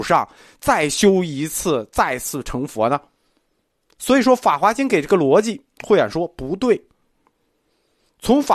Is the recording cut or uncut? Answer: uncut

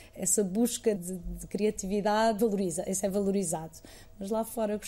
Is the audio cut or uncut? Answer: cut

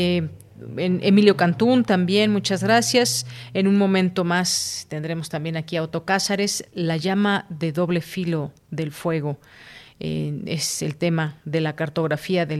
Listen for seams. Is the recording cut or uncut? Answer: cut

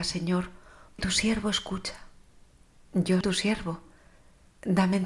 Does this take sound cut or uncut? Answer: cut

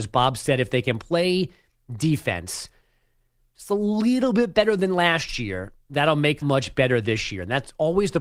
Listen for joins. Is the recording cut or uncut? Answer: cut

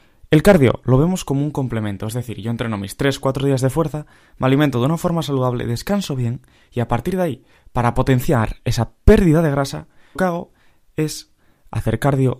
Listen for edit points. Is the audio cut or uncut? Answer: cut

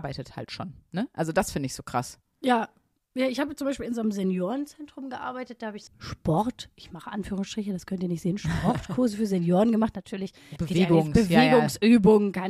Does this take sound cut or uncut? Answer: cut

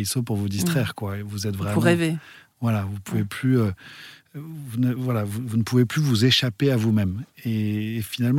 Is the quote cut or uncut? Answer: uncut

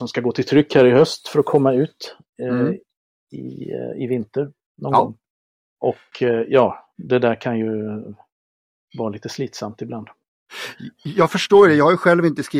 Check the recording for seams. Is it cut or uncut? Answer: uncut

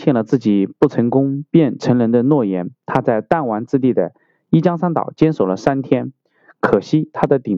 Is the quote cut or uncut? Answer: uncut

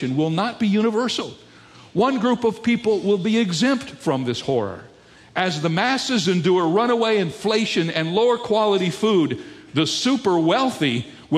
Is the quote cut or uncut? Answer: uncut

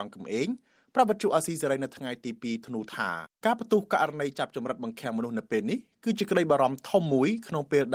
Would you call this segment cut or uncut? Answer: cut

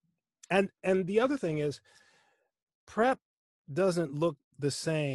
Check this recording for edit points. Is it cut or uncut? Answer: uncut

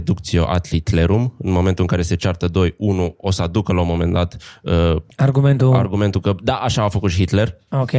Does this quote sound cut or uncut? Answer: cut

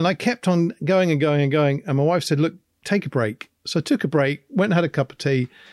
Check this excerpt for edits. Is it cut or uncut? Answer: uncut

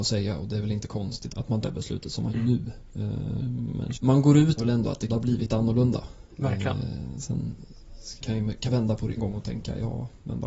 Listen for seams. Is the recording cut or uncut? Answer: cut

